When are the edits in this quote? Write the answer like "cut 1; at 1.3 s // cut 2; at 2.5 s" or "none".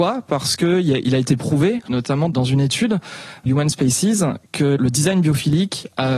cut 1; at 3.5 s